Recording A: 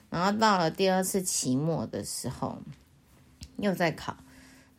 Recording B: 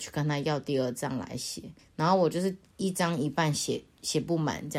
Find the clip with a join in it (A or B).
B